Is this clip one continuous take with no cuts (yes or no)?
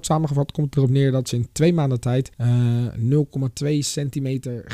no